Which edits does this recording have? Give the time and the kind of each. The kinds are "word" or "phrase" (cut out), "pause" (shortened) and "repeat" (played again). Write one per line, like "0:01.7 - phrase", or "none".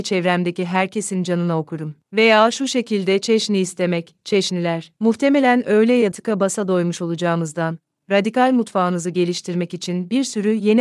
0:06.1 - phrase